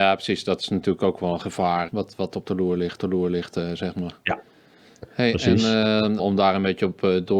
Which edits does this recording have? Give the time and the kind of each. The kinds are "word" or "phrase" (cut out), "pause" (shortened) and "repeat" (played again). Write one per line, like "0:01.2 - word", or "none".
0:01.9 - word
0:03.0 - repeat
0:05.1 - pause
0:06.2 - word